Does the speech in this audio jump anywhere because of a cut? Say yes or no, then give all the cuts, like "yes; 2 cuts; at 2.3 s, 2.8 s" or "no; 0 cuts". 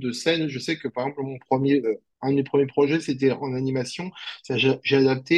no; 0 cuts